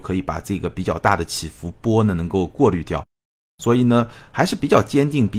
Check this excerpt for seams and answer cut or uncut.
uncut